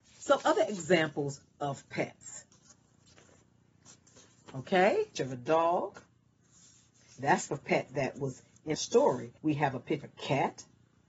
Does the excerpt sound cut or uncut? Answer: cut